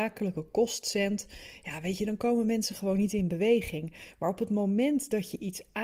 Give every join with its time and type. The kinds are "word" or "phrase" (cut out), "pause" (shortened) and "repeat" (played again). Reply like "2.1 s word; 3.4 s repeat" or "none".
none